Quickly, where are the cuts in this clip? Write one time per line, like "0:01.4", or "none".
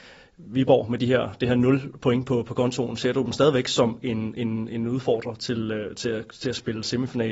none

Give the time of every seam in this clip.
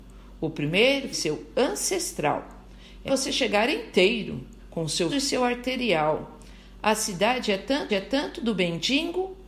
0:01.1
0:03.1
0:04.6
0:05.1
0:07.9

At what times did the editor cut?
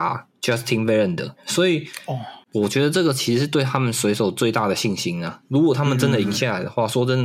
0:01.4

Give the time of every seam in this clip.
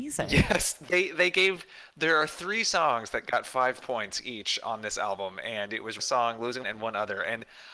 0:06.0
0:06.6

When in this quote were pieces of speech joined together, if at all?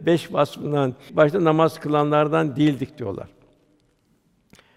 0:01.1

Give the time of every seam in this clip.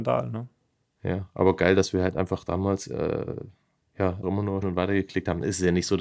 0:04.2
0:04.6

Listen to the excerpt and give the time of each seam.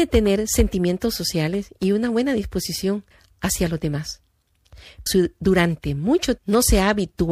0:03.1
0:05.1
0:06.4

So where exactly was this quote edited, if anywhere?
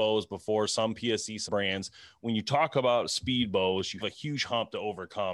0:01.5
0:04.0

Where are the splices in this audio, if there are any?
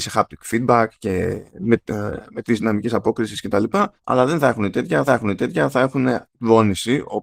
0:01.5
0:02.4
0:04.0
0:05.1
0:06.2

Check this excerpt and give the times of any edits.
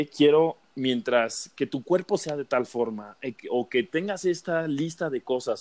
none

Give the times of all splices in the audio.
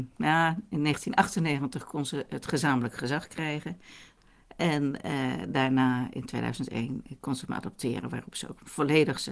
none

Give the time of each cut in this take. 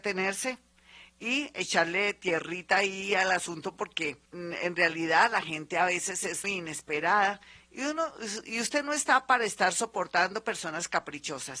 0:04.3
0:06.4

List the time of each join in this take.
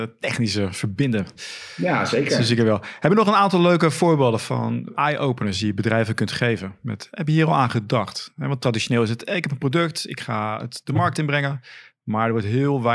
0:04.9

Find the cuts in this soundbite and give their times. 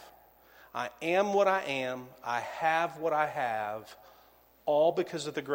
none

